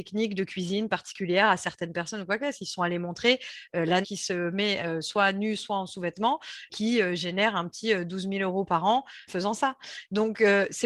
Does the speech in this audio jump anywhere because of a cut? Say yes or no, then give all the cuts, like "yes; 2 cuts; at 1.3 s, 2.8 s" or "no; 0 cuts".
yes; 3 cuts; at 4.0 s, 6.7 s, 9.3 s